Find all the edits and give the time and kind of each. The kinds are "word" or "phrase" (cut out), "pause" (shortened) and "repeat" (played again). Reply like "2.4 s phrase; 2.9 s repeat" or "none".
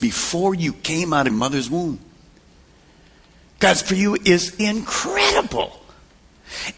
1.3 s word; 3.8 s word; 4.6 s word